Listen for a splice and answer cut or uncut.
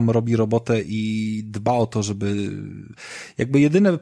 uncut